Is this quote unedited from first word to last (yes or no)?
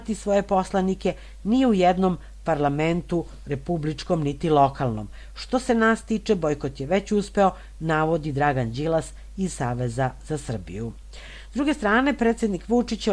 yes